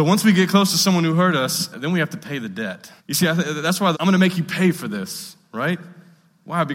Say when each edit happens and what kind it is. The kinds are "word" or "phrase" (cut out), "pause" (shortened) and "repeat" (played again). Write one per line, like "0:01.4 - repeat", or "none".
0:01.7 - word
0:03.0 - pause
0:03.9 - phrase